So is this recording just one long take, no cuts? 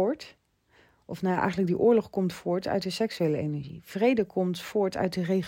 yes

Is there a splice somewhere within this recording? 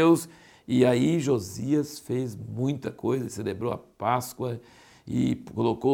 no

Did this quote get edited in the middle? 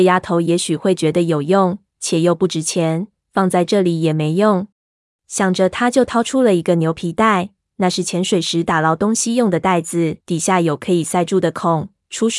yes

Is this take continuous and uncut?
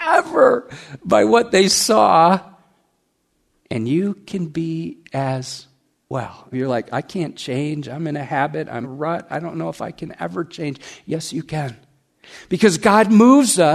no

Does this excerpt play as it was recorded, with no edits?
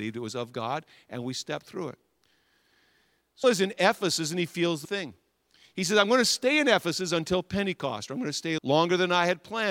no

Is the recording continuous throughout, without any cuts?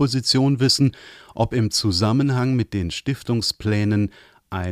yes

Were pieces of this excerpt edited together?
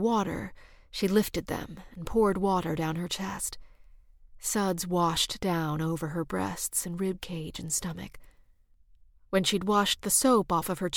no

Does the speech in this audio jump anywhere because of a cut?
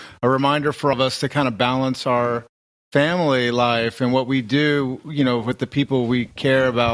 yes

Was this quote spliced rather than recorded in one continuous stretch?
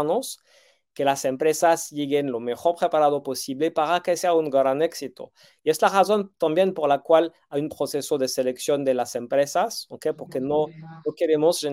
no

